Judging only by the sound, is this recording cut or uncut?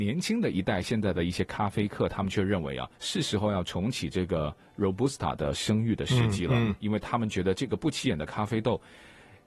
cut